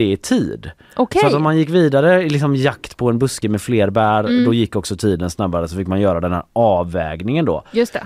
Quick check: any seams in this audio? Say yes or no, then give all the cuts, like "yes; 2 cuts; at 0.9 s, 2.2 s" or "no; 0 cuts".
no; 0 cuts